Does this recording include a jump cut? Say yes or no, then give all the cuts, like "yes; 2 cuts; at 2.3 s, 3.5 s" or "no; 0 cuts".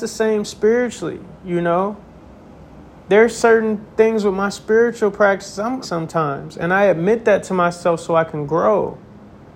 yes; 2 cuts; at 2.9 s, 5.8 s